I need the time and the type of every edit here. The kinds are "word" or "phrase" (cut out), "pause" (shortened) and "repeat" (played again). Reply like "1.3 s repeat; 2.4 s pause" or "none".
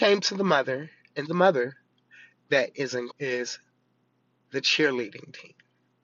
1.3 s word; 2.3 s phrase; 3.1 s word